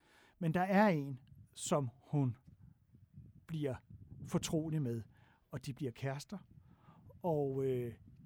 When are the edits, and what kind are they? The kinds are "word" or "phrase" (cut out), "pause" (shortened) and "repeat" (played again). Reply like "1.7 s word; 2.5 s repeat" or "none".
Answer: none